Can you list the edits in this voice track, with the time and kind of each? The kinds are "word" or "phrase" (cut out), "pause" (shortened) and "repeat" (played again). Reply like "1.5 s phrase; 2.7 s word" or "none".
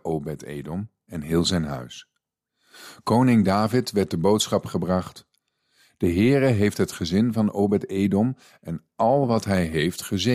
none